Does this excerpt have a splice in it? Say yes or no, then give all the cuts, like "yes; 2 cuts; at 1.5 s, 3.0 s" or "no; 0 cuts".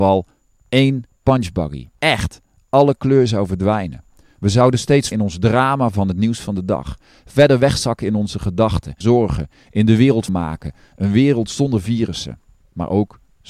yes; 4 cuts; at 1.9 s, 5.1 s, 9.0 s, 10.3 s